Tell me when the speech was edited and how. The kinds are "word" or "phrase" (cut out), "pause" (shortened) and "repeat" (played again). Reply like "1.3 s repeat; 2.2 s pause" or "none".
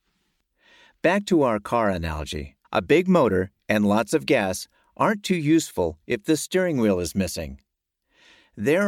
2.6 s pause